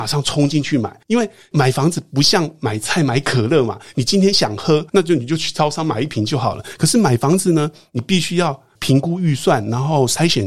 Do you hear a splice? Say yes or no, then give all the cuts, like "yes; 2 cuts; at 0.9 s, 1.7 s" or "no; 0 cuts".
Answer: yes; 2 cuts; at 1.0 s, 4.9 s